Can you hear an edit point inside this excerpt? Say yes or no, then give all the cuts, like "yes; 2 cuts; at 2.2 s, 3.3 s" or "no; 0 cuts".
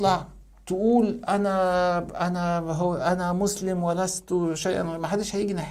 no; 0 cuts